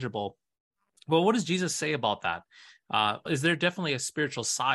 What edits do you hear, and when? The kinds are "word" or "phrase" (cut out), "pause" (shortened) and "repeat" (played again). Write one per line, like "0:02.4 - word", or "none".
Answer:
0:03.3 - word